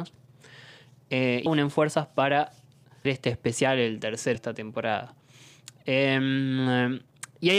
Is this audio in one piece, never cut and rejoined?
no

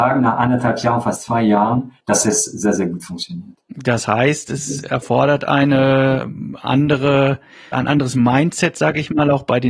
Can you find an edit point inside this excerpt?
yes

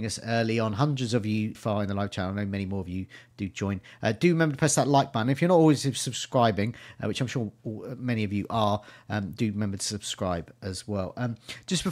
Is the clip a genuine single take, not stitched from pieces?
no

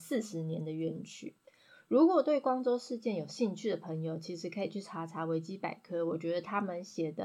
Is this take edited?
no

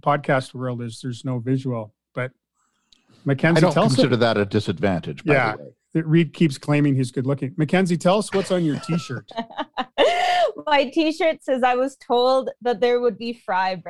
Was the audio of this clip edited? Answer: no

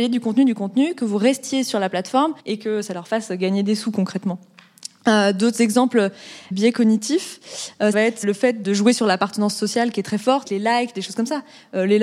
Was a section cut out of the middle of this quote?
yes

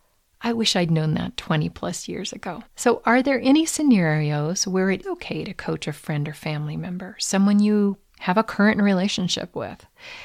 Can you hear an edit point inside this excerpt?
yes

